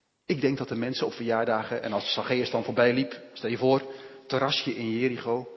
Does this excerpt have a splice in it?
no; 0 cuts

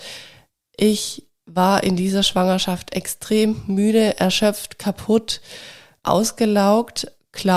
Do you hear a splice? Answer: no; 0 cuts

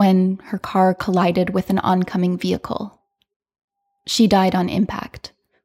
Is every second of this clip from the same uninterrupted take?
yes; 0 cuts

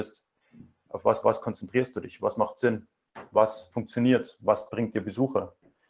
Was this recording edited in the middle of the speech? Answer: yes; 1 cut; at 1.2 s

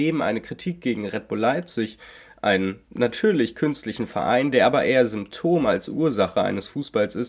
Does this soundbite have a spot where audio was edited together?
yes; 1 cut; at 2.8 s

